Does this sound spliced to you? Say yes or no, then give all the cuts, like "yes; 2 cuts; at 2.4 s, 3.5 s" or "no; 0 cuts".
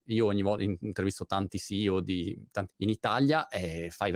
yes; 1 cut; at 2.7 s